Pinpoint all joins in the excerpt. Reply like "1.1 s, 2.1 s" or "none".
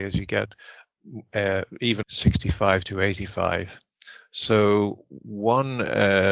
2.0 s